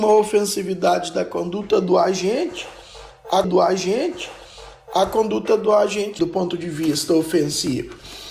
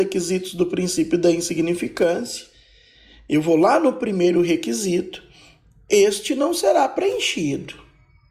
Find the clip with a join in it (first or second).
first